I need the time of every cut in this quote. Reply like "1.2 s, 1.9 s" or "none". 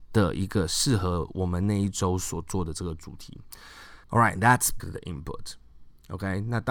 4.0 s, 4.8 s